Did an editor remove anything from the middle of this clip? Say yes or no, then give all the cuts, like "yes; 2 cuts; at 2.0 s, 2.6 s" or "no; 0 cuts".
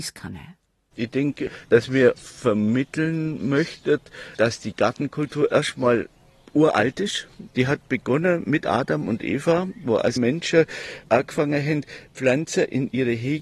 yes; 2 cuts; at 2.2 s, 10.2 s